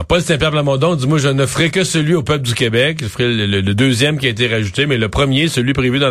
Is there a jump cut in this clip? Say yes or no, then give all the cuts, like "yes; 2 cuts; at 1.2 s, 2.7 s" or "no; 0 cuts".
no; 0 cuts